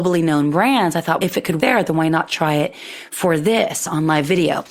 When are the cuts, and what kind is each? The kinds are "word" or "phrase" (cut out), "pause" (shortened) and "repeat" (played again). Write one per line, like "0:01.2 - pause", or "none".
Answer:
0:01.2 - word
0:01.6 - word

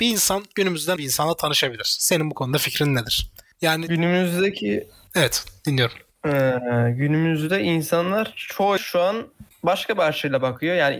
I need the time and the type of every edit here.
0:01.0 - word
0:08.8 - word

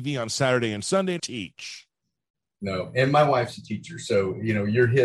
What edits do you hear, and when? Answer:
0:01.2 - phrase

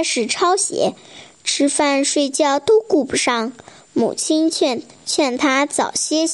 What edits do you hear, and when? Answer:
none

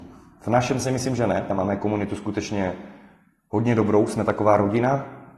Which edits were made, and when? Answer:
none

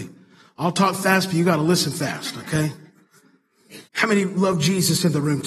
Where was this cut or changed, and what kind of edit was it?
0:03.9 - pause

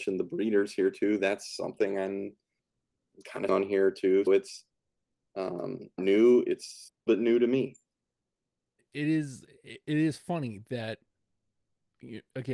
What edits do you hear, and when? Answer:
0:03.5 - word
0:04.3 - word
0:06.0 - phrase
0:07.1 - phrase
0:08.8 - word

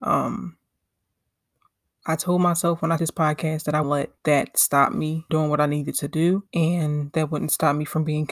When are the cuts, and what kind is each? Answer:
0:03.0 - word
0:03.8 - word
0:04.2 - pause
0:05.3 - word
0:06.5 - pause

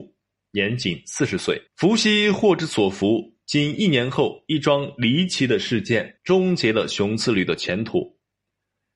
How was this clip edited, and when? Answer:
0:01.7 - pause
0:06.2 - pause

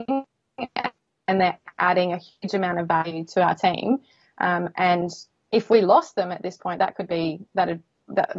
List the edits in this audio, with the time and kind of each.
none

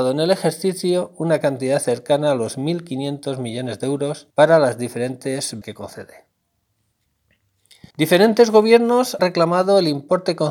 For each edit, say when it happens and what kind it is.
0:04.3 - pause
0:05.6 - word
0:07.9 - pause
0:09.2 - word

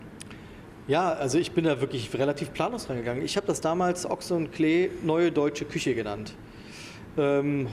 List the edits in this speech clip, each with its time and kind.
none

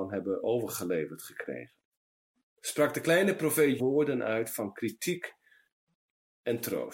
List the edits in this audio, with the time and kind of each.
0:03.8 - word

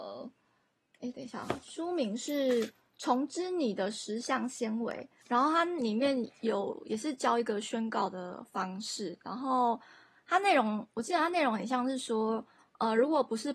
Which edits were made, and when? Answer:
0:05.2 - pause

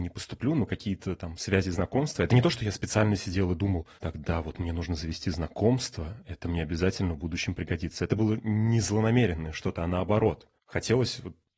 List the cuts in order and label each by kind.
0:04.0 - pause
0:10.6 - pause

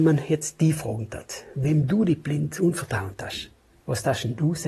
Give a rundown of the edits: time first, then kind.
none

